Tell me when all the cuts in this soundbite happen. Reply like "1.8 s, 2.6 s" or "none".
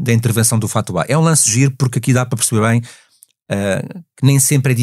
none